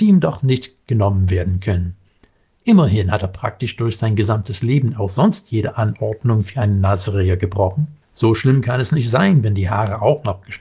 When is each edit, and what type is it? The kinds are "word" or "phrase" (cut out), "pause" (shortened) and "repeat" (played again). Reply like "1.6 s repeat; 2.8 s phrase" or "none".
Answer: 8.0 s pause